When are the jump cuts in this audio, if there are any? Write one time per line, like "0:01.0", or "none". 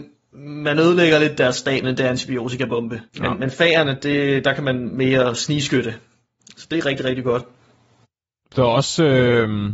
0:01.8
0:03.1